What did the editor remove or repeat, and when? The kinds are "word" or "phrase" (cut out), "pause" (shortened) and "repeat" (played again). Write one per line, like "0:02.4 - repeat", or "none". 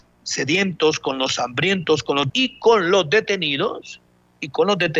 0:02.3 - word